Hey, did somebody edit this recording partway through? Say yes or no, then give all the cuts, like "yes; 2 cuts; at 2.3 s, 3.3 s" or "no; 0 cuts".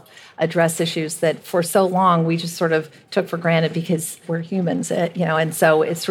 no; 0 cuts